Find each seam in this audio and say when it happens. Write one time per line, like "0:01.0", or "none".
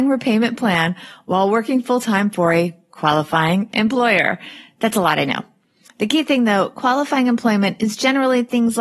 none